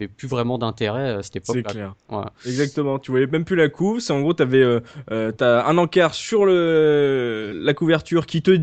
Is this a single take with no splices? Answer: yes; 0 cuts

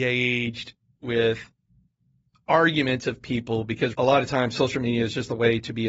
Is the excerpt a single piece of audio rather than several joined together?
no; 1 cut; at 3.9 s

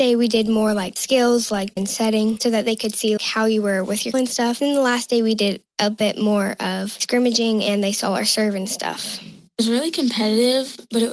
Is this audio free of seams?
no; 3 cuts; at 1.8 s, 3.2 s, 4.1 s

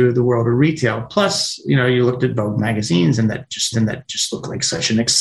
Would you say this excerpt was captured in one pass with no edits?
no; 1 cut; at 3.7 s

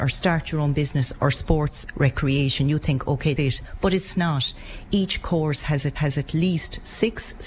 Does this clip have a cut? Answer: yes; 3 cuts; at 1.9 s, 3.4 s, 5.9 s

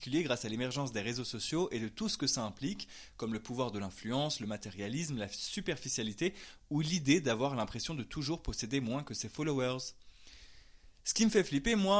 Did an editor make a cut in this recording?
no; 0 cuts

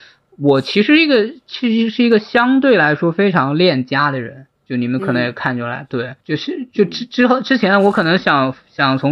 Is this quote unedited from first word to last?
no; 2 cuts; at 4.5 s, 6.2 s

